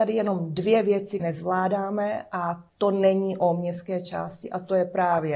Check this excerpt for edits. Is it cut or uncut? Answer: cut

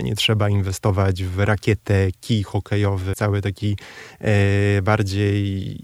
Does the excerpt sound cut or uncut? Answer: cut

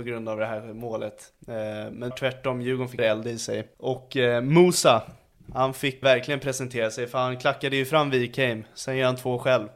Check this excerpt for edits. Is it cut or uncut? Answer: cut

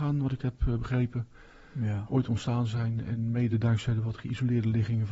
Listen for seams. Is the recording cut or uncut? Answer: uncut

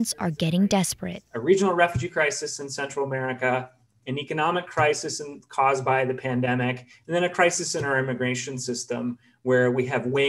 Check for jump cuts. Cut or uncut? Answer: uncut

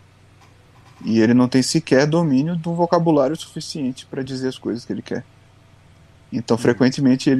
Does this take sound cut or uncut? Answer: uncut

